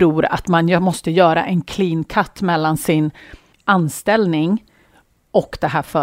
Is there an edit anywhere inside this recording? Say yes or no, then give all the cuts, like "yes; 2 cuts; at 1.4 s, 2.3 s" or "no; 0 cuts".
no; 0 cuts